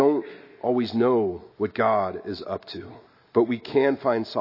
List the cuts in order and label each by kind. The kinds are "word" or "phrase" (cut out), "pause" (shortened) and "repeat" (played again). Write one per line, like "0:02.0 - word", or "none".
0:01.5 - pause
0:03.1 - pause